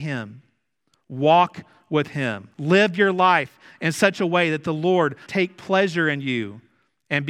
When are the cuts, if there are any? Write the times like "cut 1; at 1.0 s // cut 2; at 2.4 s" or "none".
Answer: cut 1; at 2.5 s // cut 2; at 5.3 s